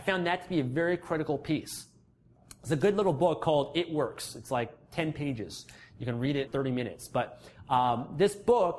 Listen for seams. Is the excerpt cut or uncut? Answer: cut